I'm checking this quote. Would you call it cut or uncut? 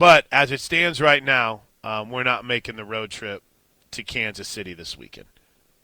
uncut